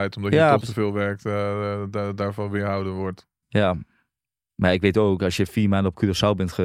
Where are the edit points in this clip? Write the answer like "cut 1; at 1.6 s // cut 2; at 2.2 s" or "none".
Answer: none